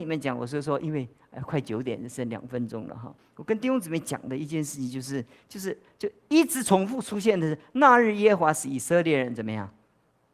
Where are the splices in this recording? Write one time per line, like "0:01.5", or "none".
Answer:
0:03.2